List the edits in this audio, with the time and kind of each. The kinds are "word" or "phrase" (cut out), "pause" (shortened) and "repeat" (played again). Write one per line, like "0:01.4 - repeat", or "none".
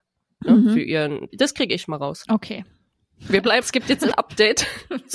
0:01.3 - word
0:03.6 - word
0:04.1 - word